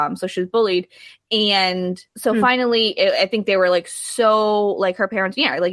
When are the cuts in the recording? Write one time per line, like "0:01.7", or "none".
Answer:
0:02.1